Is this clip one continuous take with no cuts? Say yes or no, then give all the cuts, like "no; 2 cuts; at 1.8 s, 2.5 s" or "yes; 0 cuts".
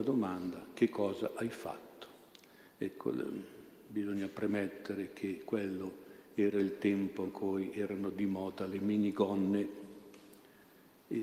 yes; 0 cuts